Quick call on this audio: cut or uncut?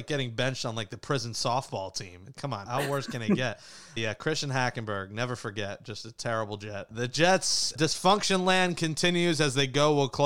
cut